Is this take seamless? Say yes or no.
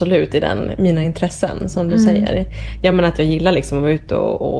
yes